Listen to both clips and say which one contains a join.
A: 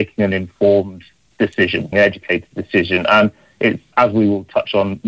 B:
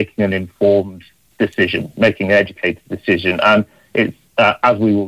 A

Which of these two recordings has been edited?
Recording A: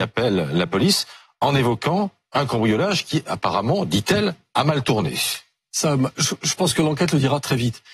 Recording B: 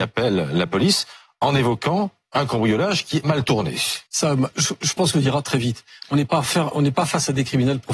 B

